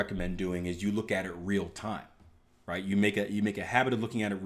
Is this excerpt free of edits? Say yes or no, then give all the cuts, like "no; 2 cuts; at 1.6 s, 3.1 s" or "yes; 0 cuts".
yes; 0 cuts